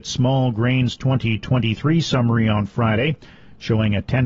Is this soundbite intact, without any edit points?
yes; 0 cuts

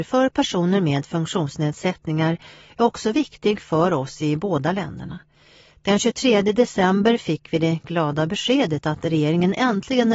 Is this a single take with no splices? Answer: yes; 0 cuts

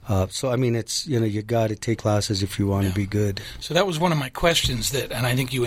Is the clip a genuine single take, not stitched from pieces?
no; 1 cut; at 2.0 s

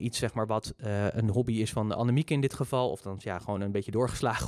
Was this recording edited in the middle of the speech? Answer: no; 0 cuts

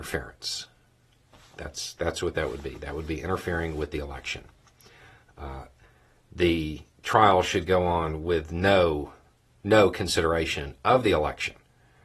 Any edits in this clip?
no; 0 cuts

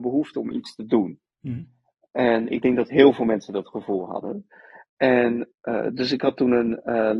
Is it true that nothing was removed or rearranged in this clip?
no; 1 cut; at 5.5 s

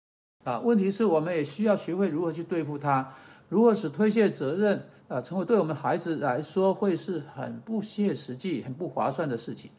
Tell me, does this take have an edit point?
no; 0 cuts

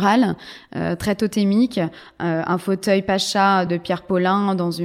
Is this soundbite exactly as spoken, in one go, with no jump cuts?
yes; 0 cuts

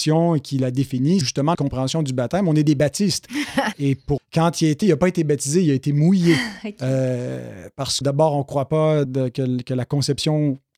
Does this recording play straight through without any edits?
no; 7 cuts; at 1.2 s, 1.5 s, 3.7 s, 4.2 s, 4.8 s, 8.0 s, 9.0 s

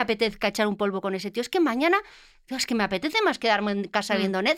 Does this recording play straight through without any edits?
yes; 0 cuts

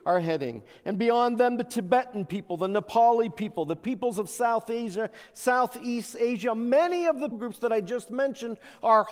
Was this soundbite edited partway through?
yes; 1 cut; at 7.3 s

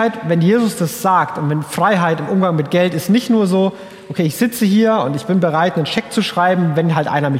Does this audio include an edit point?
no; 0 cuts

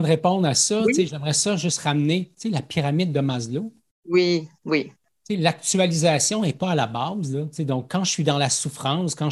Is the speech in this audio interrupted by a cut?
no; 0 cuts

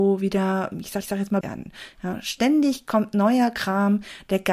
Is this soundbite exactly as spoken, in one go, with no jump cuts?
no; 2 cuts; at 1.0 s, 1.4 s

